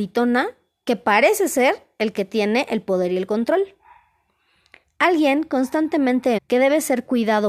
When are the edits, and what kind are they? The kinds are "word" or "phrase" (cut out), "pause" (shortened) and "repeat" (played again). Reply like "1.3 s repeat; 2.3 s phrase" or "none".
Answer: 6.4 s word